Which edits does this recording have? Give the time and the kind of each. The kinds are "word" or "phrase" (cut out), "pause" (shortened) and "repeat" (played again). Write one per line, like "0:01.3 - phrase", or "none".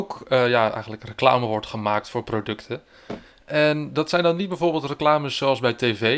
none